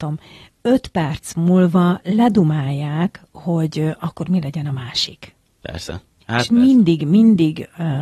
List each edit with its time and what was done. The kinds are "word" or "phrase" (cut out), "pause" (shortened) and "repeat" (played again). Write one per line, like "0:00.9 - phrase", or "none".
none